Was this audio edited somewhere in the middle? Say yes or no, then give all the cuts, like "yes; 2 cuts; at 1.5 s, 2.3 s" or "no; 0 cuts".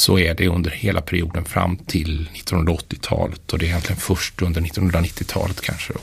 no; 0 cuts